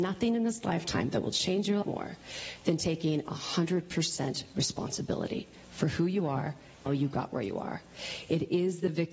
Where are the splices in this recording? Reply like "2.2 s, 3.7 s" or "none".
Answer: 1.8 s, 6.9 s